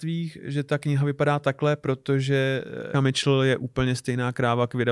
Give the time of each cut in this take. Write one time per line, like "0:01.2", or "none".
0:02.9